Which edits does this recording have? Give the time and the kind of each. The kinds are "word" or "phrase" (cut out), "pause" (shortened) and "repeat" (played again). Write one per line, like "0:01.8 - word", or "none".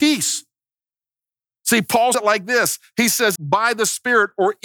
0:02.1 - word
0:03.4 - phrase